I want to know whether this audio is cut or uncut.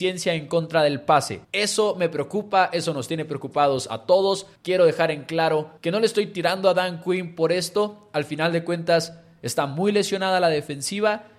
cut